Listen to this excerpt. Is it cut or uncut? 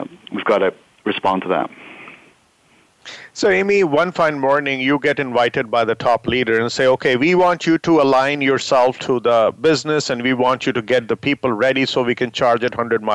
uncut